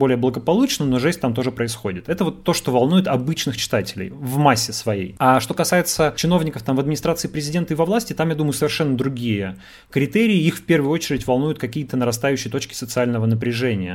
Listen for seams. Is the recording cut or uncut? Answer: uncut